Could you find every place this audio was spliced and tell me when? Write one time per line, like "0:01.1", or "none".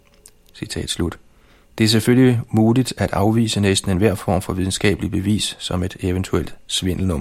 0:01.5